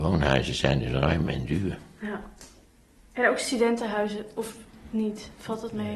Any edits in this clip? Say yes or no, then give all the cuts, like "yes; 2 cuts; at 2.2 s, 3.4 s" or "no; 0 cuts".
no; 0 cuts